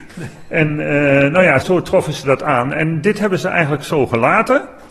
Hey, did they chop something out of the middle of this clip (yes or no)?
yes